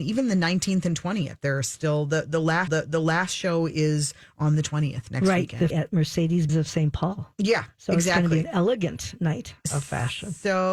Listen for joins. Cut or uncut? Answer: cut